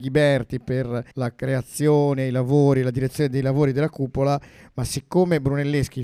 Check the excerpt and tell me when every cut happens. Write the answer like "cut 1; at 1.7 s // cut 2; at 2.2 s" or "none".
cut 1; at 1.1 s